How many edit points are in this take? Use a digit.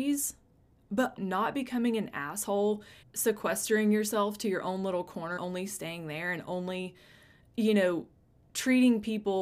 3